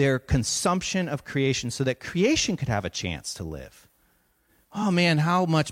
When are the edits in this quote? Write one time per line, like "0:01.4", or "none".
none